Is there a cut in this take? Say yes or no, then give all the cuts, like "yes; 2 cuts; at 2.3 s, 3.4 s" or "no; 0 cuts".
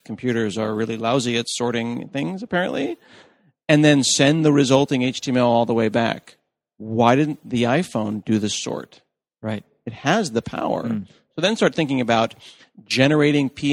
no; 0 cuts